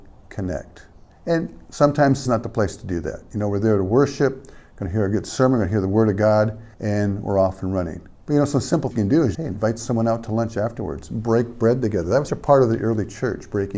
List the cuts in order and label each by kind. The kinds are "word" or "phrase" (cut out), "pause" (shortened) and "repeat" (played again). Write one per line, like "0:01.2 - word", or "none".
0:01.1 - pause
0:02.2 - word
0:06.7 - pause
0:08.1 - pause
0:08.9 - word
0:09.3 - word
0:12.3 - word